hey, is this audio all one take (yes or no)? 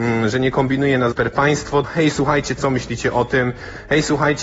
no